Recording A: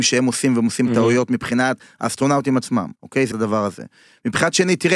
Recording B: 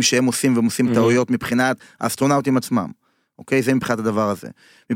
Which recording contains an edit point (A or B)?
A